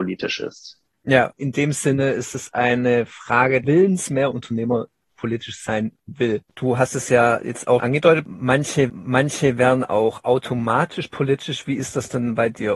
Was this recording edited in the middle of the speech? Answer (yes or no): yes